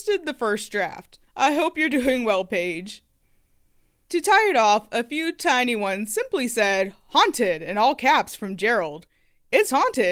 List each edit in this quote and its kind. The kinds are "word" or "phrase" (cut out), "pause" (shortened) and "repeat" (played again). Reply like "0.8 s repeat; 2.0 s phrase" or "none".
1.2 s pause